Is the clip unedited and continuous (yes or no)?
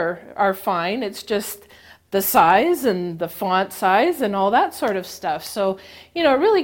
yes